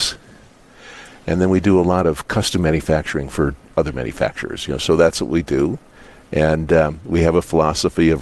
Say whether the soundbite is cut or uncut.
uncut